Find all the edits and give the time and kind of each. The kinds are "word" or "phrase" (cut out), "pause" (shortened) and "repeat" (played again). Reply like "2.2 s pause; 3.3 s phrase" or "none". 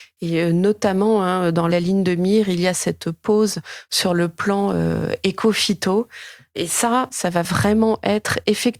none